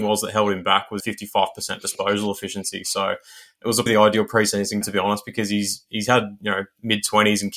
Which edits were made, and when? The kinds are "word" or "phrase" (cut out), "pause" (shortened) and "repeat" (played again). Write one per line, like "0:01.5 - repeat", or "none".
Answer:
0:01.0 - phrase
0:03.9 - word
0:04.8 - word